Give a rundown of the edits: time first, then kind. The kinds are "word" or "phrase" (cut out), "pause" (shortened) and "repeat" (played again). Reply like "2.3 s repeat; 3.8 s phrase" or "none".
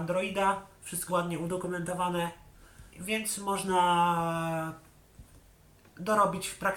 1.1 s word; 2.9 s pause